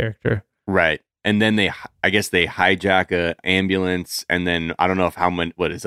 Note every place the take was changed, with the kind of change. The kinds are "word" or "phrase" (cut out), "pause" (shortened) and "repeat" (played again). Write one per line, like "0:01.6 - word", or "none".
none